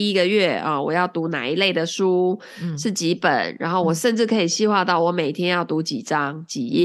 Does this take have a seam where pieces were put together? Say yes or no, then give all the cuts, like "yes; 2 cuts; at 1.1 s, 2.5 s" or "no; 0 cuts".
no; 0 cuts